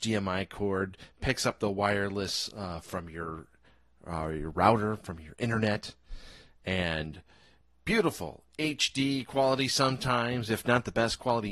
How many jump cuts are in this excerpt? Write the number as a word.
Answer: zero